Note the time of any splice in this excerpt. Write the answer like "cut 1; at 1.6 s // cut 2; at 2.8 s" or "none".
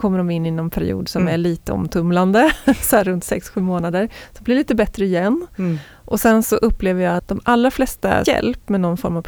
cut 1; at 7.2 s // cut 2; at 8.3 s